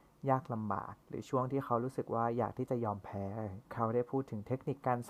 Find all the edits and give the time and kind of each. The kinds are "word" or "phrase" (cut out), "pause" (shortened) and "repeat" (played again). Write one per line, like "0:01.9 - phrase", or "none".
0:01.0 - pause
0:03.7 - pause